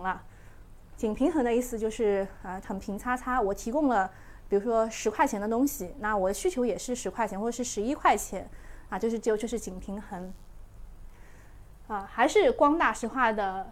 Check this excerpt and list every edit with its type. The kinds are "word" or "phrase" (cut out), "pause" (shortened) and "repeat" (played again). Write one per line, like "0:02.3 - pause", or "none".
0:02.6 - phrase